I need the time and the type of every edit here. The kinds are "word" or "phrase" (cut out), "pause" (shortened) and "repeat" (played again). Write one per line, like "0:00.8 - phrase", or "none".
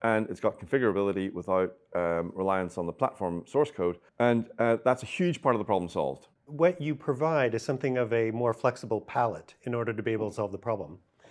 0:04.1 - pause
0:06.4 - pause